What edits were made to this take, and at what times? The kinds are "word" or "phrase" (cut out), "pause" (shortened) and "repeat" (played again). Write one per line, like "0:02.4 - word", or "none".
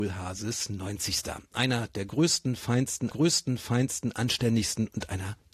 0:03.1 - repeat